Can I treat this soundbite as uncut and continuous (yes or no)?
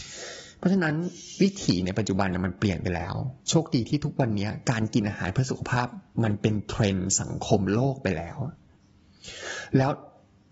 yes